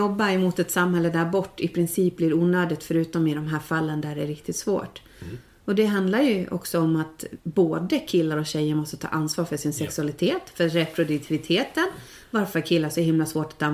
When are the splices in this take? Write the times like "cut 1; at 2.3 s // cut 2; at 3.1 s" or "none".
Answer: cut 1; at 7.4 s